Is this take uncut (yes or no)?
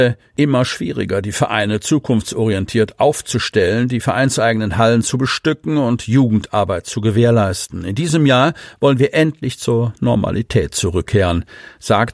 yes